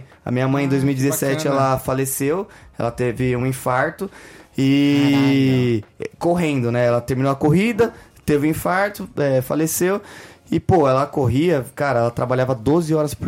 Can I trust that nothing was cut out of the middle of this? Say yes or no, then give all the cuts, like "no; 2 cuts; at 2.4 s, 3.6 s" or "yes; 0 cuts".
yes; 0 cuts